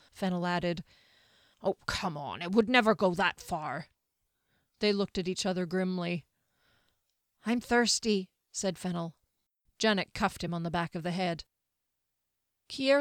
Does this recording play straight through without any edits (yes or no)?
yes